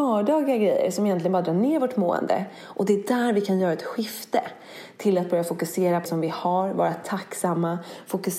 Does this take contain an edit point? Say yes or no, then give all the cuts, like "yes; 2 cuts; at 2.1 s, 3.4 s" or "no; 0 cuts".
yes; 1 cut; at 6.1 s